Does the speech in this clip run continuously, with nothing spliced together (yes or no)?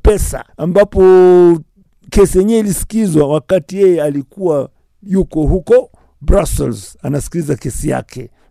yes